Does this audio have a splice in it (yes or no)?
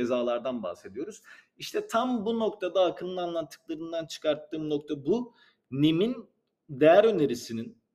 no